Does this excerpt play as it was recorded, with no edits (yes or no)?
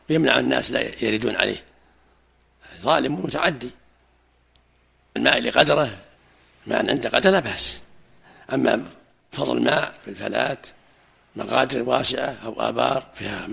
no